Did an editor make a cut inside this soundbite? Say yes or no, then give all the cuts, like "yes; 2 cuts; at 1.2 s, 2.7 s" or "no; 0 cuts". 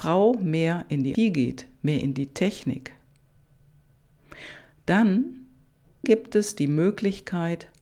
yes; 2 cuts; at 1.1 s, 6.0 s